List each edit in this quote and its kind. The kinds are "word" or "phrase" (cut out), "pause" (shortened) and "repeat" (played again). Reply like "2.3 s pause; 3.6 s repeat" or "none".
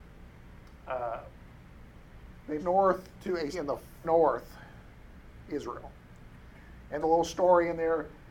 2.6 s word; 3.5 s word; 4.0 s word; 5.4 s word; 7.0 s word